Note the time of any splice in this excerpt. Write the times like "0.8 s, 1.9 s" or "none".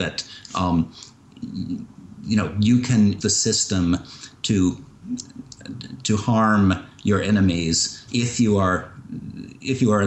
3.2 s, 8.1 s